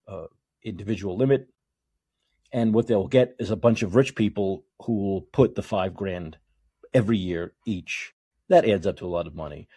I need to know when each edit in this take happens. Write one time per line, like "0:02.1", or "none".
0:04.7